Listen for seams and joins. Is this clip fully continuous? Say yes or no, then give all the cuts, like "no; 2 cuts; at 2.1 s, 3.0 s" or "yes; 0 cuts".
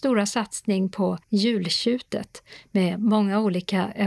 no; 1 cut; at 1.2 s